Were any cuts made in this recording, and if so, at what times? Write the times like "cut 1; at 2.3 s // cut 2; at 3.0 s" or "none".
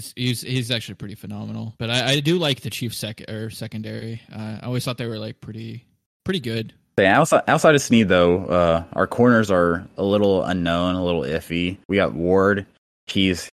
cut 1; at 11.9 s